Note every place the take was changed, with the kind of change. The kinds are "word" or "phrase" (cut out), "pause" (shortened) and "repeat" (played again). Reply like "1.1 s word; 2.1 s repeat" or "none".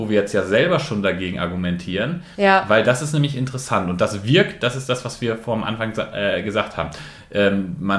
none